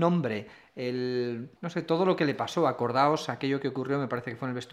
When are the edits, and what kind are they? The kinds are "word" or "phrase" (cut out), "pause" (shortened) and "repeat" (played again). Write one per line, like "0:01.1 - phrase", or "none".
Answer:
0:01.6 - pause